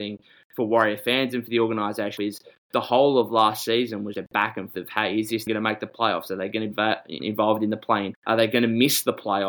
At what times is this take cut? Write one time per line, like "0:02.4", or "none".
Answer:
0:02.2
0:04.1
0:04.7
0:05.5
0:06.7
0:07.2
0:08.1